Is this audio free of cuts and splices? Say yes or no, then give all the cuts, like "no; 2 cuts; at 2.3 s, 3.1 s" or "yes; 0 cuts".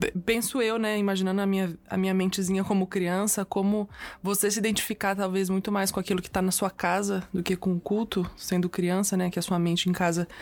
yes; 0 cuts